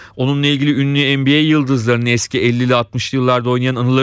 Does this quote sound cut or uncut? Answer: uncut